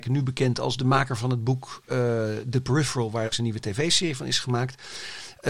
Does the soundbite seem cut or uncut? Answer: cut